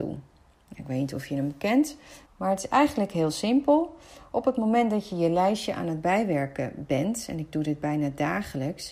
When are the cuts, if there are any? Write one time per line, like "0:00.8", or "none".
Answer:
0:02.2